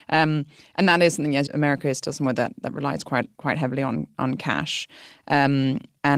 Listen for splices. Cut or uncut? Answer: cut